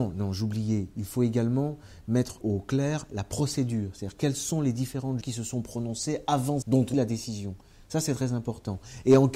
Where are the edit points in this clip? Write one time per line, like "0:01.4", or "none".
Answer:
0:02.4
0:05.2
0:06.6
0:06.9

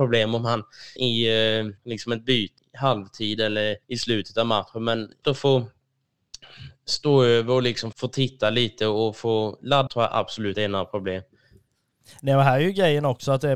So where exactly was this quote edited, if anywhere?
0:01.0
0:01.8
0:02.6
0:03.8
0:05.2
0:07.9
0:09.9
0:10.5

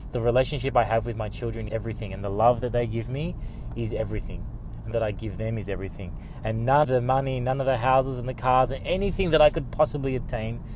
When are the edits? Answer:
0:01.7
0:04.9
0:06.8

